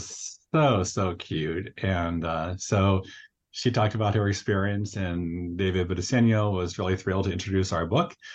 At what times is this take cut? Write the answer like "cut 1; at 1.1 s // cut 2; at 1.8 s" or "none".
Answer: none